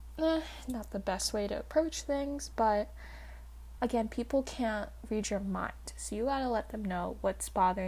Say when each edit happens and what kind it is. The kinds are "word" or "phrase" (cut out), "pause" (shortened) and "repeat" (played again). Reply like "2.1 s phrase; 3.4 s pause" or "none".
none